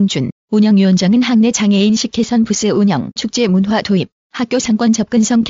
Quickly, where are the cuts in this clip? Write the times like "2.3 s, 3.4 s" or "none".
3.2 s